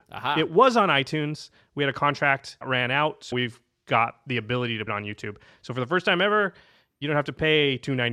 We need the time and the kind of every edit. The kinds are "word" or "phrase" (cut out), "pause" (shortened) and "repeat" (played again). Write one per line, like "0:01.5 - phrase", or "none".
0:02.6 - word
0:03.3 - word
0:04.9 - word